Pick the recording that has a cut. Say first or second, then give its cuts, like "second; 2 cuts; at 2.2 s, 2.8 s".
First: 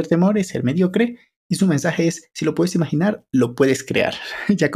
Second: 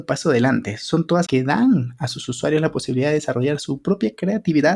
second; 1 cut; at 1.3 s